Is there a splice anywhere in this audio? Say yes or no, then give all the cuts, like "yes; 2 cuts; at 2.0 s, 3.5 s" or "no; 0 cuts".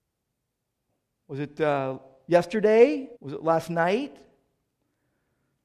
yes; 1 cut; at 3.2 s